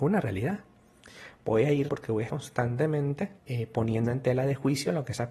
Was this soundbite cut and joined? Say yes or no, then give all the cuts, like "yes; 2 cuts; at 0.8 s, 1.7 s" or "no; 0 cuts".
yes; 3 cuts; at 1.9 s, 2.3 s, 3.4 s